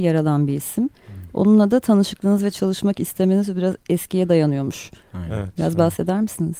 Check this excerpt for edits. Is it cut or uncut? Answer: uncut